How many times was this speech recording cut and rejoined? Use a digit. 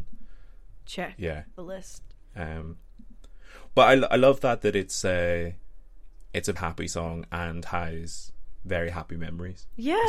2